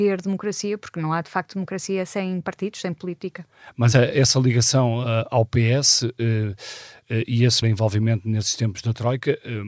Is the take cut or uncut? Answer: cut